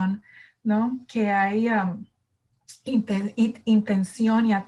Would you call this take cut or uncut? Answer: uncut